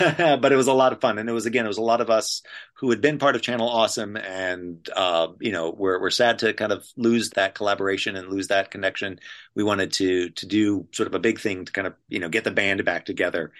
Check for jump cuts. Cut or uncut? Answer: cut